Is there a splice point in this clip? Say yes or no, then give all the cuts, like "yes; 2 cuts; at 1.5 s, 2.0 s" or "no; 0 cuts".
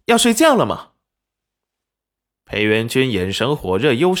no; 0 cuts